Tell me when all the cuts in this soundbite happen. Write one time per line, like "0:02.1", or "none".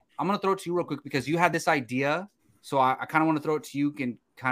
0:02.4